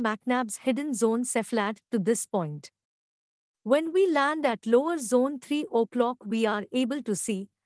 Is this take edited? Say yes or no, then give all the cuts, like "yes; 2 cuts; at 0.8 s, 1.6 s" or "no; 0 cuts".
no; 0 cuts